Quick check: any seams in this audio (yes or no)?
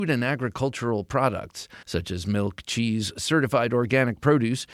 yes